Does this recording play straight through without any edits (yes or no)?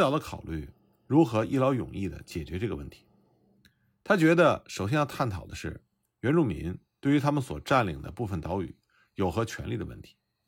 yes